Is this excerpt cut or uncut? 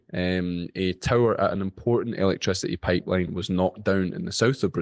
uncut